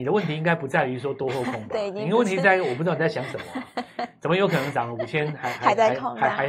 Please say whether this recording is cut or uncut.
uncut